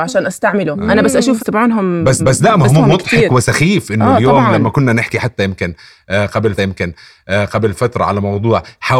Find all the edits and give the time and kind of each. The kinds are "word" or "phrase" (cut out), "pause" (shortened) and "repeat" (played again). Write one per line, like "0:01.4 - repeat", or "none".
0:01.4 - word
0:02.2 - repeat
0:02.7 - word
0:06.6 - repeat